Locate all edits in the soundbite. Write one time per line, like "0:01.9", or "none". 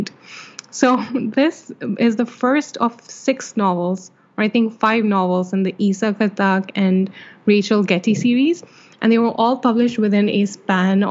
none